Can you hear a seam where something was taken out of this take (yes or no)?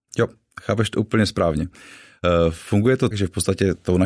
yes